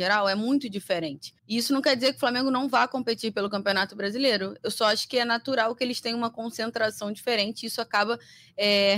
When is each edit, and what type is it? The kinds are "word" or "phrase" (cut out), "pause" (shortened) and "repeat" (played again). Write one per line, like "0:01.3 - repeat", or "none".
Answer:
0:01.4 - pause